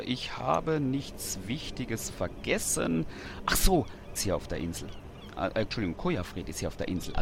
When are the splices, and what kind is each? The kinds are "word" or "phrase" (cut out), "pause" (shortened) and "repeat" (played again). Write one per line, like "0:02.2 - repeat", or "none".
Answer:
0:04.2 - phrase
0:05.7 - phrase